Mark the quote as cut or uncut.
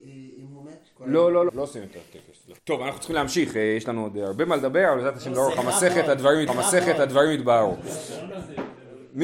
cut